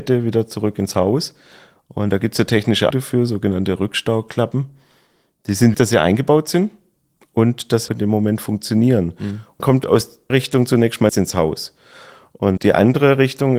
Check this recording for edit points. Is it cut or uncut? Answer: cut